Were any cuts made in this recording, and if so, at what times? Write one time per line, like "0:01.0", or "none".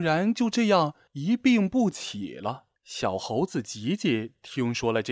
0:02.8